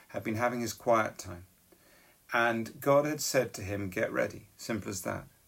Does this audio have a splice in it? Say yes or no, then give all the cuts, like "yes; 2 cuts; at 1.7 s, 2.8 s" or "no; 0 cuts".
no; 0 cuts